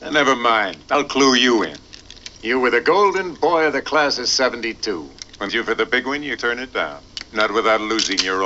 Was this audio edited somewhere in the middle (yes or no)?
yes